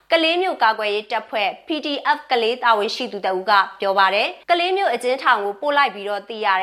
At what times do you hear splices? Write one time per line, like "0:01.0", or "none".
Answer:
0:04.4